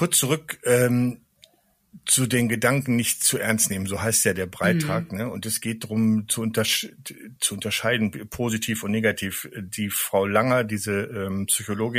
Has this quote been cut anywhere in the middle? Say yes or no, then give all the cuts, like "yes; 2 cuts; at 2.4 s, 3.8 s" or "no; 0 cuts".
yes; 1 cut; at 7.4 s